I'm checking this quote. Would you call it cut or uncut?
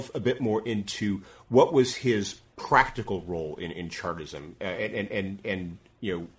cut